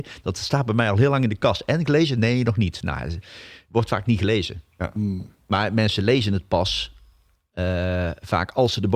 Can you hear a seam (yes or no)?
no